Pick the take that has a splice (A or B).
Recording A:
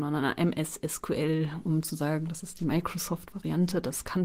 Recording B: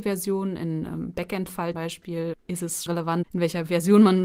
B